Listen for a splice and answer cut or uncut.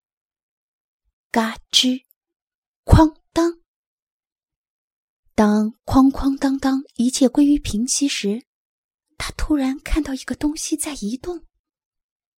uncut